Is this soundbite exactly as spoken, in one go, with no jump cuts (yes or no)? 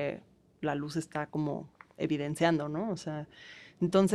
yes